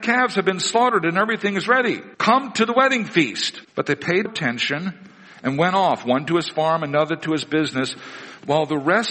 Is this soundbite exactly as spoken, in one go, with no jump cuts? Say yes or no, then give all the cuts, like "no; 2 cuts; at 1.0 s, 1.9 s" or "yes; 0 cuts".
no; 3 cuts; at 2.1 s, 3.6 s, 4.3 s